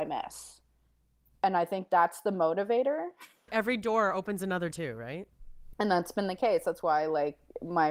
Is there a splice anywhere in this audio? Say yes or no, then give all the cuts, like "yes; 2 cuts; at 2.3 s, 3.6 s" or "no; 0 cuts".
yes; 1 cut; at 4.7 s